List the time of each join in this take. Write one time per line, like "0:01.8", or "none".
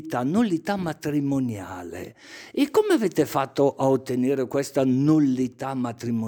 none

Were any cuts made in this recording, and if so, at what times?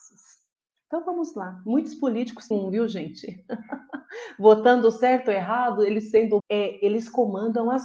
0:02.5
0:06.4

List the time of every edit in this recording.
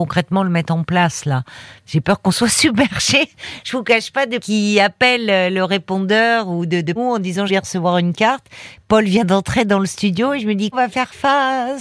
0:04.4
0:07.0
0:07.5
0:10.7

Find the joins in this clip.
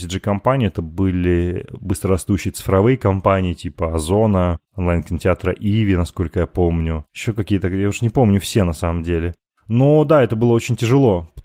none

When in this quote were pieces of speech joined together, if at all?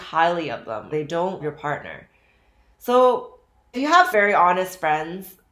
0:00.9
0:01.4
0:03.7
0:04.1

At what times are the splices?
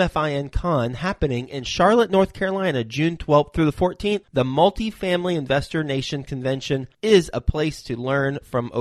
none

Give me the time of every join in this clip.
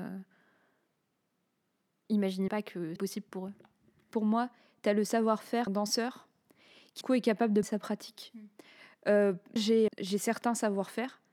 0:02.5
0:03.0
0:05.7
0:07.0
0:07.6
0:09.6
0:09.9

